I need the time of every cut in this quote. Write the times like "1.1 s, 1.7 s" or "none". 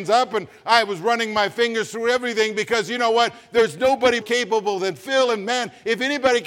4.2 s